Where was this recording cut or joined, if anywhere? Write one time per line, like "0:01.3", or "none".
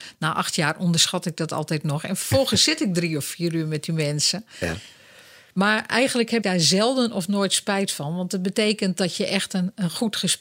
0:06.4